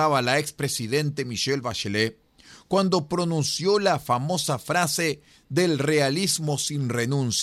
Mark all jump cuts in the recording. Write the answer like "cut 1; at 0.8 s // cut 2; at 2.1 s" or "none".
none